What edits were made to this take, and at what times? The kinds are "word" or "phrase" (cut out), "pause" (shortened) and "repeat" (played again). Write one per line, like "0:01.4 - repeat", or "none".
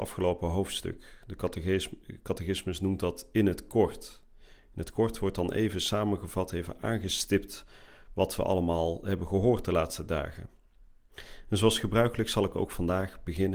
none

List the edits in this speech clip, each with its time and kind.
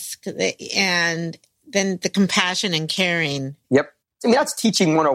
0:03.6 - pause

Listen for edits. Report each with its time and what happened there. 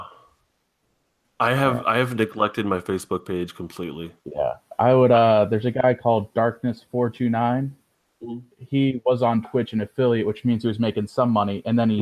0:04.2 - pause

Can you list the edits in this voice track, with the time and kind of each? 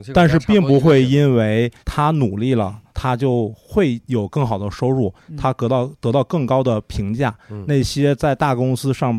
0:01.8 - pause
0:02.9 - pause

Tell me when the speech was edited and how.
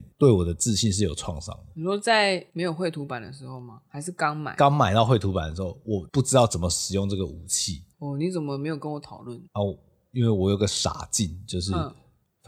0:02.5 - pause
0:07.9 - pause
0:09.5 - pause

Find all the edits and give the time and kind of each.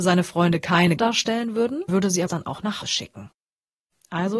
0:01.0 - word
0:01.9 - word
0:02.3 - word
0:02.8 - word

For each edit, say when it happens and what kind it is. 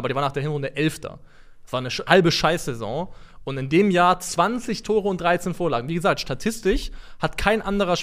0:02.1 - word

